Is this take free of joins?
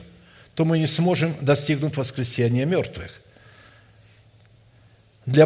yes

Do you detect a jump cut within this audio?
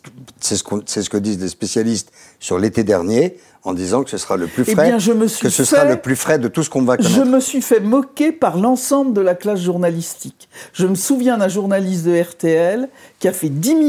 no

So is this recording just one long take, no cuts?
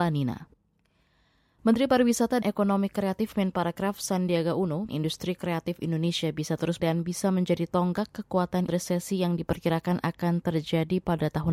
no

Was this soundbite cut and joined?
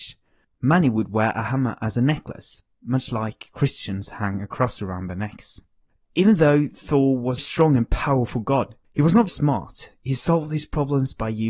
yes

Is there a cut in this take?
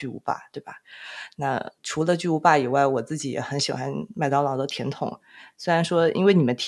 yes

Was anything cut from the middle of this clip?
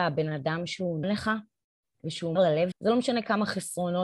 yes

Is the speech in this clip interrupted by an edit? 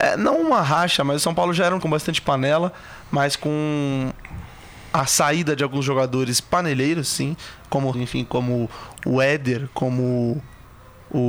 yes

